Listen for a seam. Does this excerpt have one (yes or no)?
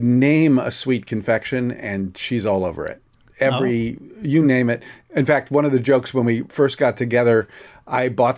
no